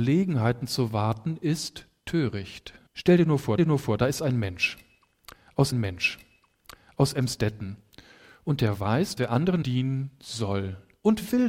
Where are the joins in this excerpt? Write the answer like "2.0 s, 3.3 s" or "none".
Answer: 2.9 s, 3.6 s, 5.7 s, 9.2 s, 9.6 s